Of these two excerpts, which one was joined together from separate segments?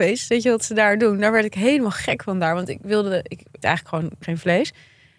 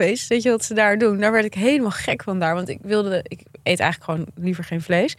first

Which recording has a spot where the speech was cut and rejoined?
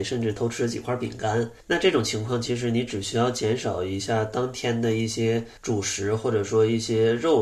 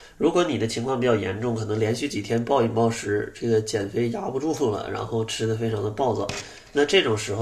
first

